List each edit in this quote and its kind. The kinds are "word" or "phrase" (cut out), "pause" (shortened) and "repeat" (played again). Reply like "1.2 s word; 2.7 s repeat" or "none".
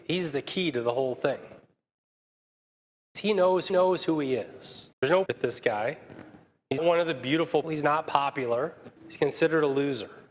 3.7 s repeat; 4.9 s pause; 5.3 s word; 6.8 s word; 7.6 s word; 9.0 s pause